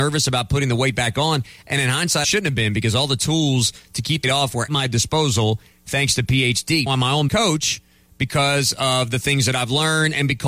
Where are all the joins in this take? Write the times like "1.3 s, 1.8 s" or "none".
2.2 s, 4.2 s, 4.7 s, 6.9 s, 7.3 s